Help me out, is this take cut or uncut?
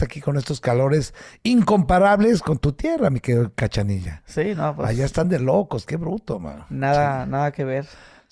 uncut